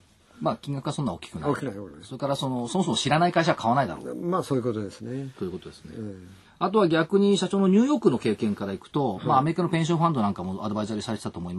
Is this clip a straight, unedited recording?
no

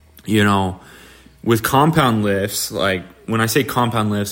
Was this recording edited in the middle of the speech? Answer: no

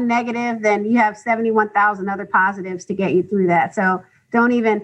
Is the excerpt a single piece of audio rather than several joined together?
yes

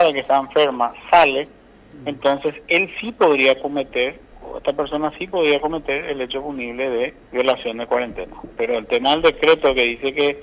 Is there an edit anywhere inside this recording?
yes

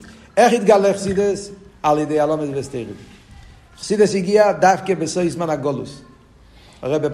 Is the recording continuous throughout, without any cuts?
yes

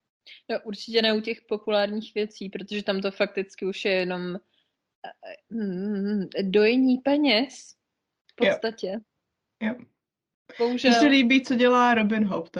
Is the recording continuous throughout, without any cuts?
yes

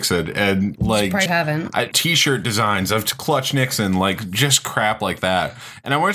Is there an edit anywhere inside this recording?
yes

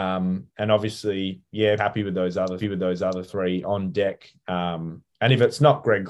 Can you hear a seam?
yes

